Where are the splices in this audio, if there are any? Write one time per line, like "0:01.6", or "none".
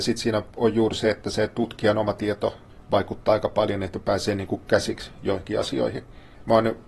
none